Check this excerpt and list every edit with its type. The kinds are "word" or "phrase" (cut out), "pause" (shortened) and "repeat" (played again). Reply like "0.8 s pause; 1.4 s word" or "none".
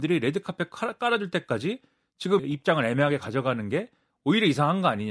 2.4 s word